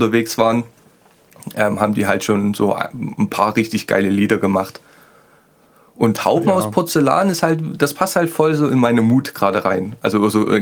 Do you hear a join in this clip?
no; 0 cuts

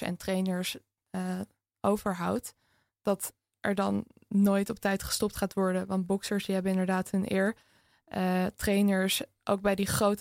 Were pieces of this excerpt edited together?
no; 0 cuts

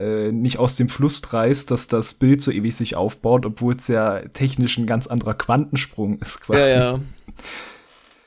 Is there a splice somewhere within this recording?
no; 0 cuts

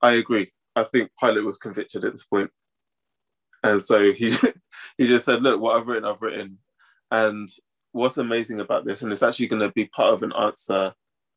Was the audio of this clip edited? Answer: no; 0 cuts

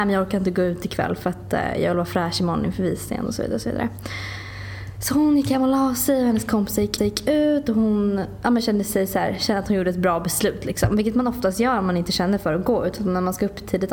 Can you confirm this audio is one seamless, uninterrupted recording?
no; 1 cut; at 7.0 s

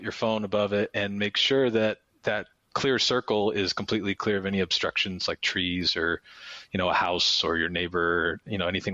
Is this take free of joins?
yes; 0 cuts

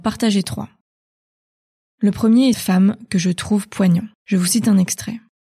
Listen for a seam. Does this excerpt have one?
yes; 2 cuts; at 2.5 s, 4.1 s

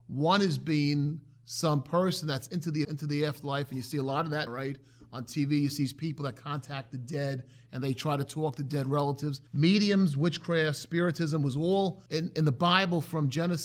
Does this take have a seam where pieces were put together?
yes; 4 cuts; at 2.8 s, 4.5 s, 9.5 s, 12.1 s

